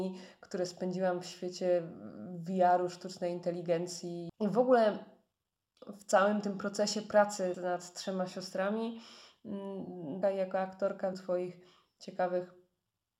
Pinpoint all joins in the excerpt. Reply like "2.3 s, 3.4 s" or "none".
4.3 s, 7.5 s, 10.2 s, 11.1 s